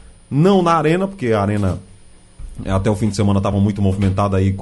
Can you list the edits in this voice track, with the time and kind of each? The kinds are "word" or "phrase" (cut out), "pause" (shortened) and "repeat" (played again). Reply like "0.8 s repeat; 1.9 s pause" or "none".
none